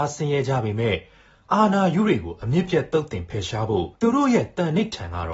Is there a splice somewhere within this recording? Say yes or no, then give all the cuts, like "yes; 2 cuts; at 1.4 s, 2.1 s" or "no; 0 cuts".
yes; 1 cut; at 4.0 s